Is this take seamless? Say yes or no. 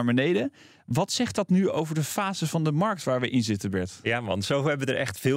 yes